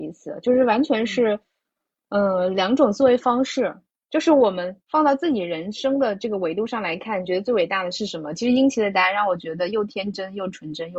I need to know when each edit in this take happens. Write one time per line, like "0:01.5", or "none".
none